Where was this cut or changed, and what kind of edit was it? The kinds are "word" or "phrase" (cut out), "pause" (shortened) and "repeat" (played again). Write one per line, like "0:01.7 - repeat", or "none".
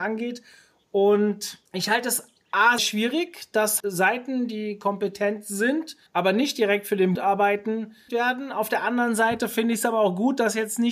0:01.7 - pause
0:02.8 - word
0:03.8 - word
0:06.1 - pause
0:07.1 - word
0:08.1 - word